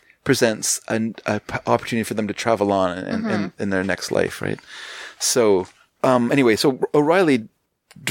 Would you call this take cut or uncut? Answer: uncut